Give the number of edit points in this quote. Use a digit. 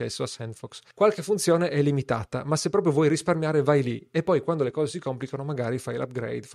1